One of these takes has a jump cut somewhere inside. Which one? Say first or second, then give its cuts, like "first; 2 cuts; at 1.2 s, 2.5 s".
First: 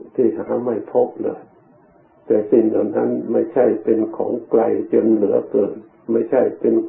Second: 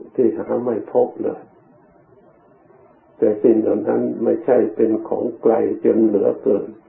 first; 1 cut; at 2.0 s